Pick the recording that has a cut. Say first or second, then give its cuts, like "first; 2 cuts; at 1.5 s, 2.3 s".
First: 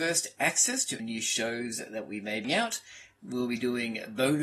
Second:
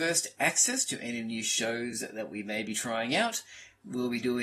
first; 2 cuts; at 1.0 s, 2.4 s